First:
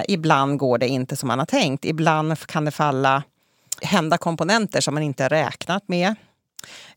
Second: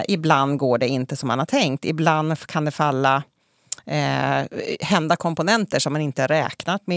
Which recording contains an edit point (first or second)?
first